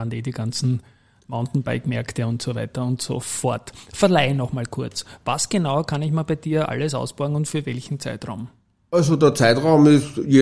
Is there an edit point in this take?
no; 0 cuts

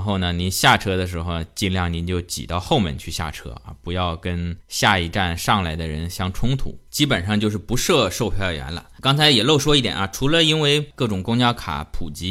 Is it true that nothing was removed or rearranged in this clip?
no; 2 cuts; at 4.6 s, 6.9 s

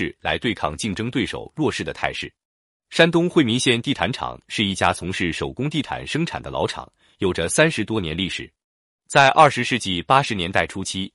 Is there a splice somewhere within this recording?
no; 0 cuts

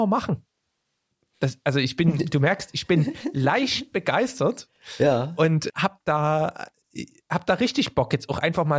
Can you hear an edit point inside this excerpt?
yes; 1 cut; at 5.7 s

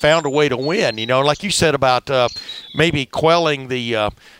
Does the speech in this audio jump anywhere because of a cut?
no; 0 cuts

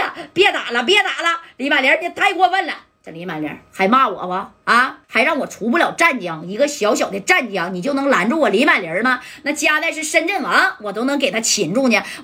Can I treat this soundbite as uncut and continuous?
no; 1 cut; at 5.0 s

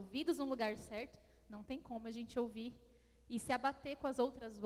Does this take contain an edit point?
no; 0 cuts

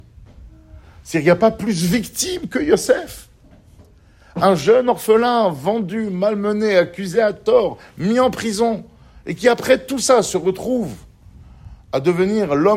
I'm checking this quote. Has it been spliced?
no; 0 cuts

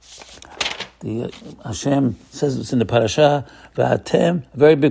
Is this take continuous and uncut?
yes; 0 cuts

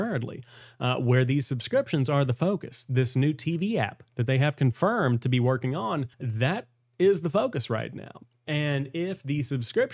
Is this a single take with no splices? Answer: no; 1 cut; at 6.1 s

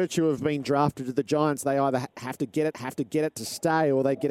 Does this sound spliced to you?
yes; 1 cut; at 2.7 s

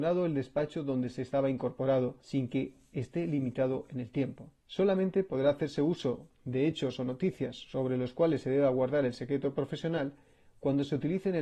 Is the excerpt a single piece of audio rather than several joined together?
no; 2 cuts; at 2.2 s, 4.6 s

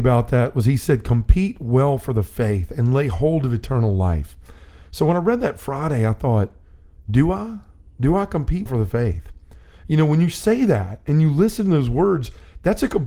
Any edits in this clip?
yes; 1 cut; at 8.7 s

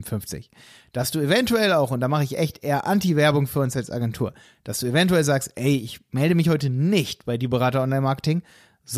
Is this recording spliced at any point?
no; 0 cuts

